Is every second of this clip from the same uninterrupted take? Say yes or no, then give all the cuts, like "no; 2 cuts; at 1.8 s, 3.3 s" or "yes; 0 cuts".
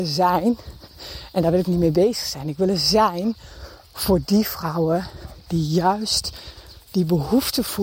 no; 1 cut; at 6.8 s